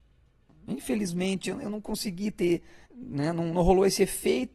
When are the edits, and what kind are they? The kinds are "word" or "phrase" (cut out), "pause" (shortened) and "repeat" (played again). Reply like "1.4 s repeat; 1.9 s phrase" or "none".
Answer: 2.8 s pause